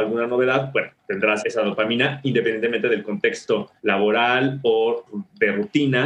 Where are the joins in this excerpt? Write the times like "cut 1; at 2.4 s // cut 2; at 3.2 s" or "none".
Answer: cut 1; at 1.4 s // cut 2; at 3.8 s